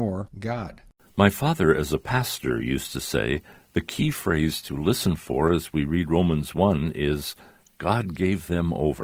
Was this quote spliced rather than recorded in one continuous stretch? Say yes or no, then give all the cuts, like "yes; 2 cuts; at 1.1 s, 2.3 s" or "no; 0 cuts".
no; 0 cuts